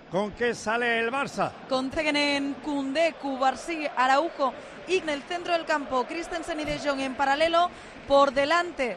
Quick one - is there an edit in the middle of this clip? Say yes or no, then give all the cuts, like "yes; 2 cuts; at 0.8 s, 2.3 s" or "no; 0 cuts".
yes; 3 cuts; at 1.9 s, 2.5 s, 5.0 s